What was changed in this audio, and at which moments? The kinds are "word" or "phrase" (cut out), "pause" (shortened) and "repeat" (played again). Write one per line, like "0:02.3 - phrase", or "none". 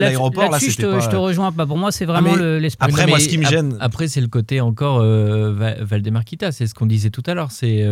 none